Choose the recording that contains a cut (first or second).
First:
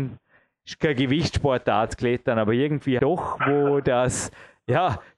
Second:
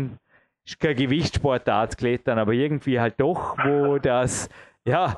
first